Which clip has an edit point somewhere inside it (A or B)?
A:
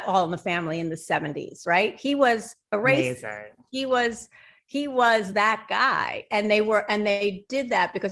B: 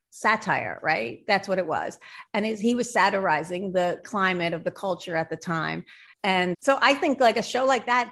B